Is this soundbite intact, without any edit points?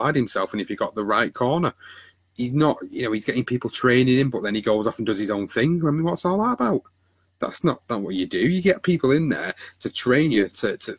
yes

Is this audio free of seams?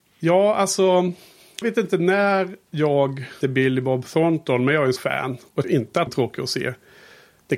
no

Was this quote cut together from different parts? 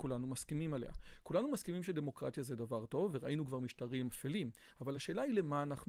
no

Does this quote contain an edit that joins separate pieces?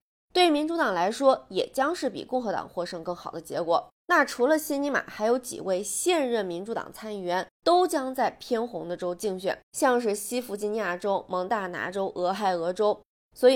yes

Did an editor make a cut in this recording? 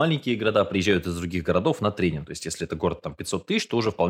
no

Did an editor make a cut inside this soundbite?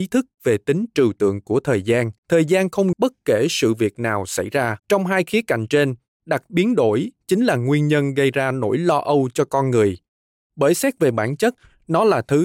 yes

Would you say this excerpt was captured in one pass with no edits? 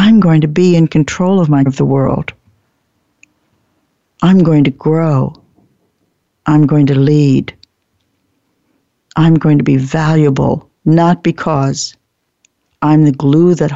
no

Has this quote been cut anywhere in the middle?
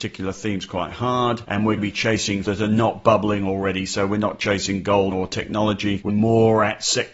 yes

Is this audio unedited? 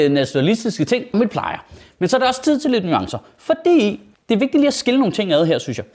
no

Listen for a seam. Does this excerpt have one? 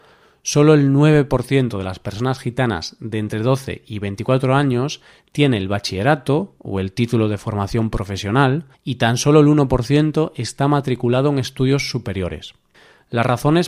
yes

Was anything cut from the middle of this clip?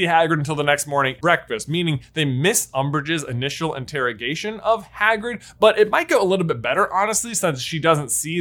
yes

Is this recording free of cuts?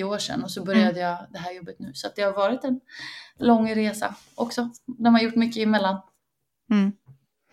yes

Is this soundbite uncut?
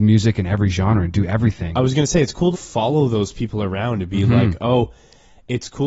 no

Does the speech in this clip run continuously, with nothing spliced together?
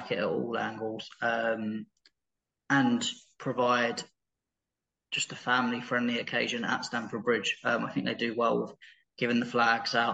yes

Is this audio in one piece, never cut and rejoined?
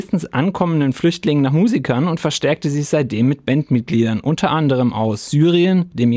yes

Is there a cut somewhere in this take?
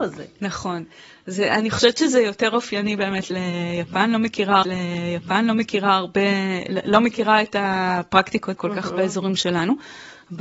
yes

